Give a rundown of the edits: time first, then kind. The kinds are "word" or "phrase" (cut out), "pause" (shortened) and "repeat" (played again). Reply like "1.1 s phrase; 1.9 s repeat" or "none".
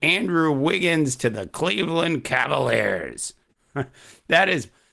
none